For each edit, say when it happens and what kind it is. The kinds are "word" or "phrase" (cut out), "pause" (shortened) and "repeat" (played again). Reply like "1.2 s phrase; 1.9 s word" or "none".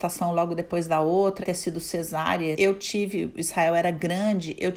1.4 s word; 2.5 s word